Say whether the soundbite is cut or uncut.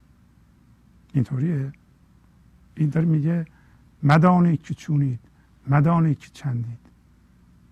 uncut